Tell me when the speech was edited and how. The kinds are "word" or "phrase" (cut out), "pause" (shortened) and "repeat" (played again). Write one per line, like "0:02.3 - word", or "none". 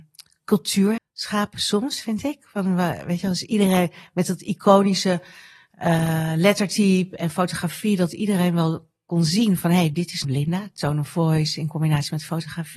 0:01.0 - word
0:10.2 - word